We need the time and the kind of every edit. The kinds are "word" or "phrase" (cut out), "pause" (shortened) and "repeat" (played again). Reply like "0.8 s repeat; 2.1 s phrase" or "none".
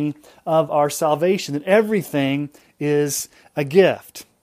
none